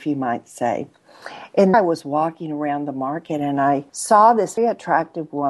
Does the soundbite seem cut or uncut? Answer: cut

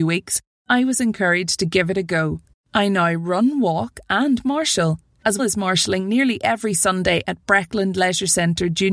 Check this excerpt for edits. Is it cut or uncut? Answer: cut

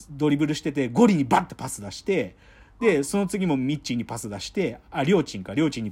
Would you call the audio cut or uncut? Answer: uncut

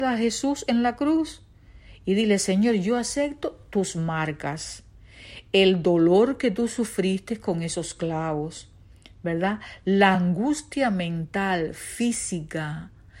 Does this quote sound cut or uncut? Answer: uncut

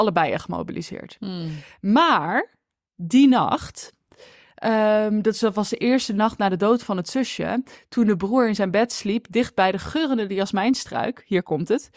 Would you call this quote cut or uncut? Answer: uncut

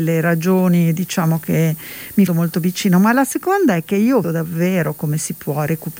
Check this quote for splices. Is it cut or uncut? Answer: cut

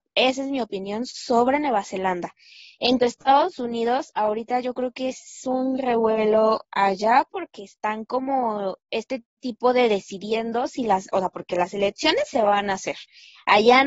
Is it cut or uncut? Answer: cut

